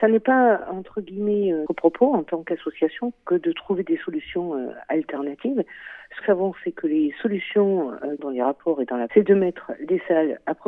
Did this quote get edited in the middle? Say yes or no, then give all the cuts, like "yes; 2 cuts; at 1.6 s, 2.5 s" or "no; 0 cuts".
yes; 4 cuts; at 1.7 s, 6.2 s, 8.2 s, 9.1 s